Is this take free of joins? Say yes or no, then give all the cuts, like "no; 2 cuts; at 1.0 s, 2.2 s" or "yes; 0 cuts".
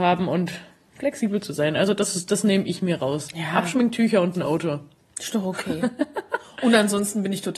yes; 0 cuts